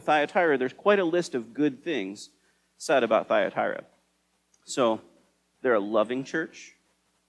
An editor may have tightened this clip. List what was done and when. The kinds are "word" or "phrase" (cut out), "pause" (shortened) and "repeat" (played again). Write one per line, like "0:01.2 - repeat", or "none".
none